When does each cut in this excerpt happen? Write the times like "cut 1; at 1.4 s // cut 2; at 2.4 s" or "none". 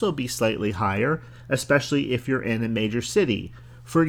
none